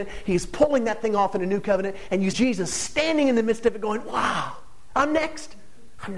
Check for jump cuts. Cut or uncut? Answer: cut